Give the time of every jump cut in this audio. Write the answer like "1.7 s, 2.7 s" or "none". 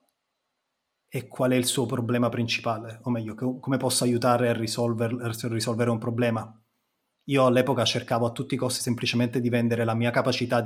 none